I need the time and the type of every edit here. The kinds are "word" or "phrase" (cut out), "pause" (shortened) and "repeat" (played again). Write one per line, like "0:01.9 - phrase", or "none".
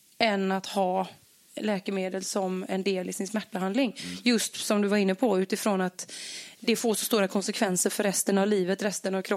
none